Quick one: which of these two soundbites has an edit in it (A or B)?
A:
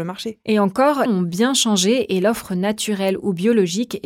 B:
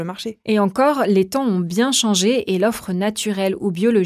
A